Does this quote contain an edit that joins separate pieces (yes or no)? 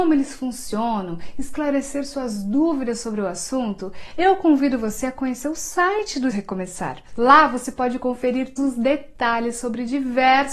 yes